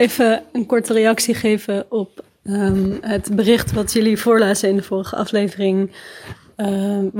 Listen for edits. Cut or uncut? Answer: uncut